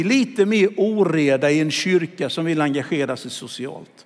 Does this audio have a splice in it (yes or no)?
no